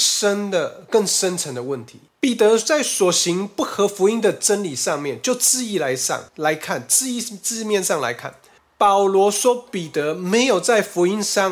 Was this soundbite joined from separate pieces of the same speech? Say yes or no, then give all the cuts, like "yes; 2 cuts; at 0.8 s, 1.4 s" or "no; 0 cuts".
yes; 3 cuts; at 2.1 s, 6.3 s, 8.6 s